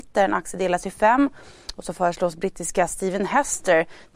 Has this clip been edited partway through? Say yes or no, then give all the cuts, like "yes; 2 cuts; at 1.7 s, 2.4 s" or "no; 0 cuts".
no; 0 cuts